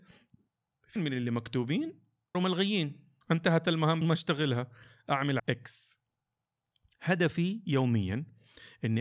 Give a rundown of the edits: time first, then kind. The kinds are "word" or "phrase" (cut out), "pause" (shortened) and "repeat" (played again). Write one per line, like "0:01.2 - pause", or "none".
0:01.0 - word
0:02.3 - word
0:03.2 - word
0:04.0 - word
0:05.4 - word